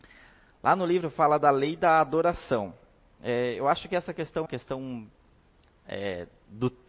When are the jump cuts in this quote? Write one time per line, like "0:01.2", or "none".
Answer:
0:04.5